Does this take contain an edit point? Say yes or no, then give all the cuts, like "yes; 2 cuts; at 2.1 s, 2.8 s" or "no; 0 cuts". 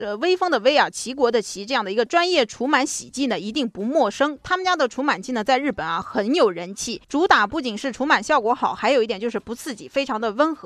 yes; 1 cut; at 7.0 s